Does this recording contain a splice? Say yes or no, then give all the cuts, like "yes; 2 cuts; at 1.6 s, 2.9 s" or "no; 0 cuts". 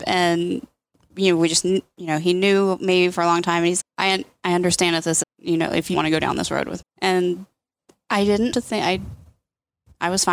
yes; 5 cuts; at 3.8 s, 5.2 s, 5.9 s, 6.8 s, 8.5 s